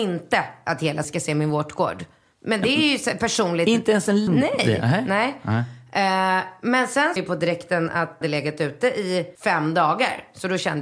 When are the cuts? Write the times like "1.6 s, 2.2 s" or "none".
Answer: 1.0 s, 4.3 s, 7.2 s, 8.2 s, 9.3 s